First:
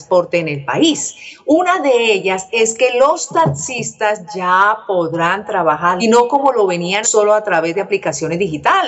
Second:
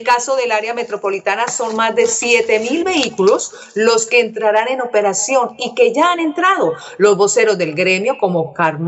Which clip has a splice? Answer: first; 2 cuts; at 6.0 s, 7.0 s

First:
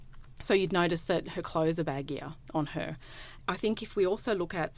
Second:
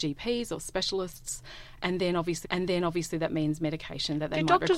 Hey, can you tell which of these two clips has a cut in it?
second; 1 cut; at 2.4 s

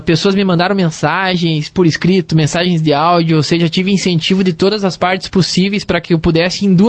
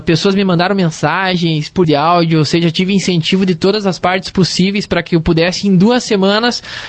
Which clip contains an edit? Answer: second; 1 cut; at 1.8 s

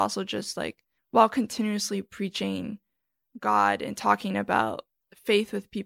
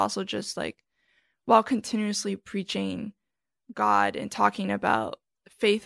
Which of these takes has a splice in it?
first; 1 cut; at 1.0 s

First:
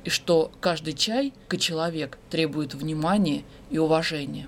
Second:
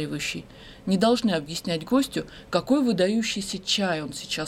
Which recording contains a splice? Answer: first; 2 cuts; at 1.5 s, 2.2 s

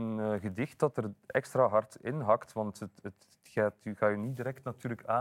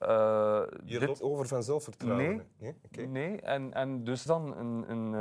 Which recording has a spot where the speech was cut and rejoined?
second; 2 cuts; at 1.2 s, 4.3 s

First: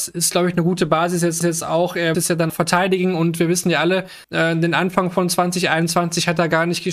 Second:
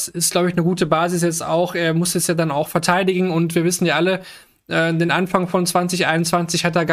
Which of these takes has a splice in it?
first; 4 cuts; at 1.4 s, 2.1 s, 2.5 s, 4.2 s

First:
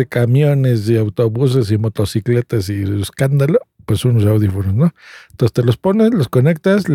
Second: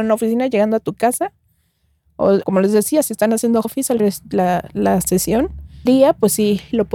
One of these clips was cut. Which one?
second; 4 cuts; at 2.4 s, 3.6 s, 4.0 s, 5.9 s

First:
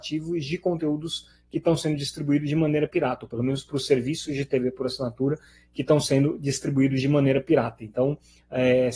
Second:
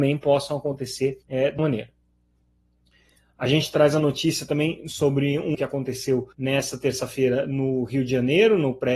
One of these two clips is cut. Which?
second; 4 cuts; at 1.2 s, 1.6 s, 5.5 s, 6.3 s

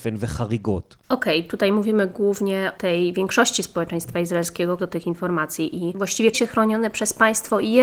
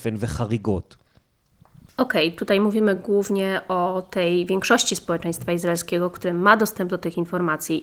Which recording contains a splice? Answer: first; 4 cuts; at 1.0 s, 2.8 s, 4.8 s, 6.3 s

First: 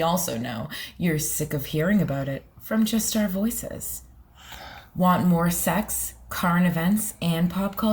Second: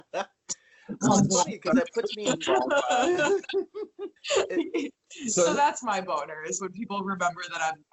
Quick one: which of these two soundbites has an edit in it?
second; 1 cut; at 4.2 s

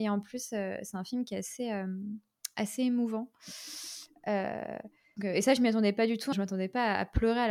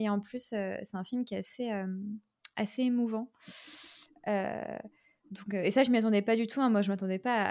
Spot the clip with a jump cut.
first; 2 cuts; at 5.2 s, 6.3 s

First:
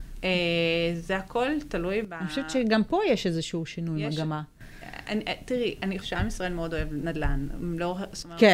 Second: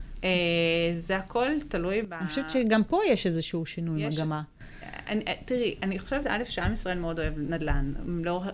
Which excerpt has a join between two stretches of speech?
first; 1 cut; at 6.0 s

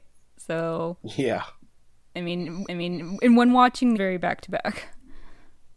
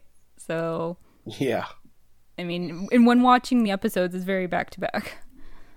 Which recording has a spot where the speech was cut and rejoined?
first; 3 cuts; at 1.0 s, 2.7 s, 4.0 s

